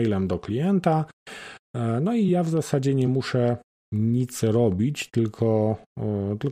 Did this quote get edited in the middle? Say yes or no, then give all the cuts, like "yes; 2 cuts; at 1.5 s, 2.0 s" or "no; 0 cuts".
no; 0 cuts